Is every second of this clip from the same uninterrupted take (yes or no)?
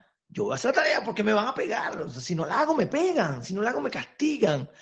yes